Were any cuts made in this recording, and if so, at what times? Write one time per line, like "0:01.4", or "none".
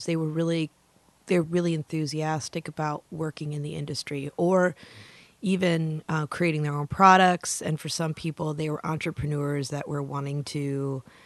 none